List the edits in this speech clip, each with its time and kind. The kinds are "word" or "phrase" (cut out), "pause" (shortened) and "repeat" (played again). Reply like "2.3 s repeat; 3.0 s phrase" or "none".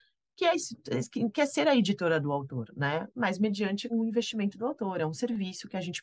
3.9 s word